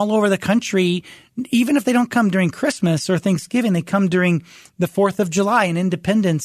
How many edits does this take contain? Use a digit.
0